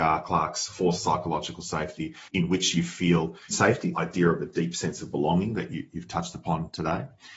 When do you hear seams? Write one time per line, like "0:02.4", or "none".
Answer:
0:00.9
0:02.3
0:03.5
0:03.9